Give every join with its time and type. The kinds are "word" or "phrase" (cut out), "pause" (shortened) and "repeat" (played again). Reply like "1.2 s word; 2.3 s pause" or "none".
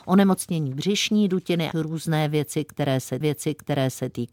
1.7 s phrase; 3.2 s repeat

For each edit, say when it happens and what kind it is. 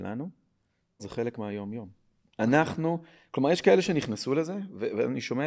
1.0 s word

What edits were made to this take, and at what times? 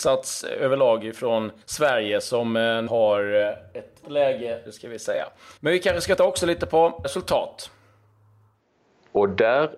1.6 s pause; 2.9 s word; 4.0 s word; 4.7 s phrase; 5.6 s pause; 6.2 s word; 7.0 s word

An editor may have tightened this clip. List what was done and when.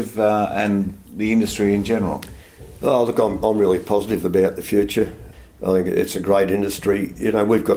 none

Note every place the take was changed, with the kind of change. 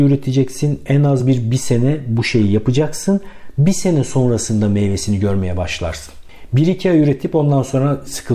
none

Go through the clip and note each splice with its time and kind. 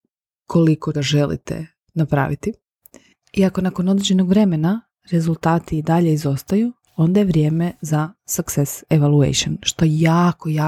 0.9 s word

